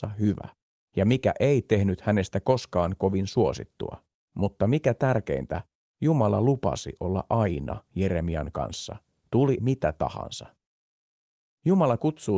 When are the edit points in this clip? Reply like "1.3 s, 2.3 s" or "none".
4.2 s, 9.6 s